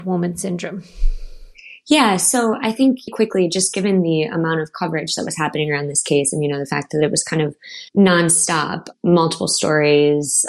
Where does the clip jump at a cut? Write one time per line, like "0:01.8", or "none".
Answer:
0:03.1
0:07.9